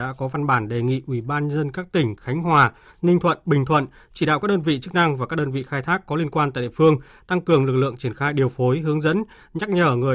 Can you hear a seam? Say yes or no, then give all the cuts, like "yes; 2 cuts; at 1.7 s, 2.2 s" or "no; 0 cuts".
no; 0 cuts